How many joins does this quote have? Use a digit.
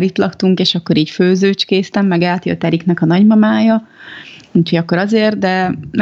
0